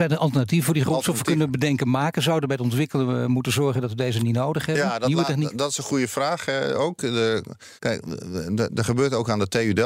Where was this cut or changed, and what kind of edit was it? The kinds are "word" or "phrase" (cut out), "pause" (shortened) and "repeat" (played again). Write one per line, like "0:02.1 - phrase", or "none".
0:07.8 - pause